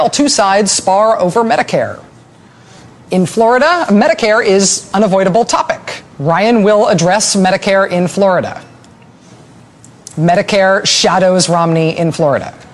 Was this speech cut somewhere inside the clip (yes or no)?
yes